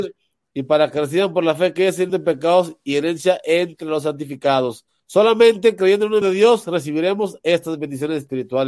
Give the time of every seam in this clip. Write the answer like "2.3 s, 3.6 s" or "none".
2.1 s, 5.0 s, 6.2 s